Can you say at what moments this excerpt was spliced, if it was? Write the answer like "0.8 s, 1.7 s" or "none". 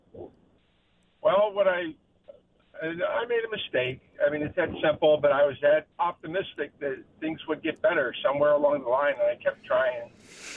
5.9 s